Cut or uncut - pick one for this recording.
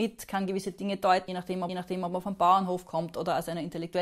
cut